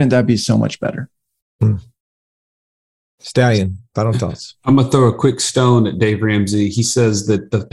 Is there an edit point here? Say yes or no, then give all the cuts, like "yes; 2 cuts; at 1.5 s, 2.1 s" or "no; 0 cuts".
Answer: no; 0 cuts